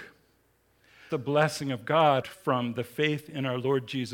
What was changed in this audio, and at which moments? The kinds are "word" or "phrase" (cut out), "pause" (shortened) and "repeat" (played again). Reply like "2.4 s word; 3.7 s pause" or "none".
1.1 s phrase; 2.2 s word